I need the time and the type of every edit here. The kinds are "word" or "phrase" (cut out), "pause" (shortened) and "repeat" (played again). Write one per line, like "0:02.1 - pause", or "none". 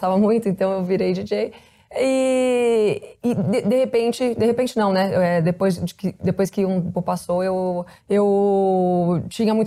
0:03.2 - pause
0:06.9 - word
0:08.0 - pause